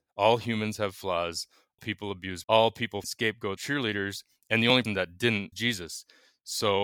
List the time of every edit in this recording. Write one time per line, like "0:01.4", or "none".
0:01.8
0:02.4
0:03.0
0:03.6
0:04.8
0:05.5